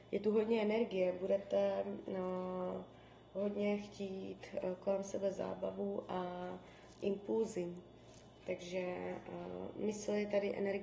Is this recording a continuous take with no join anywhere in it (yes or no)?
yes